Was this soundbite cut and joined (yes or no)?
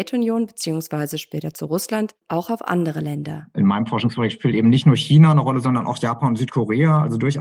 no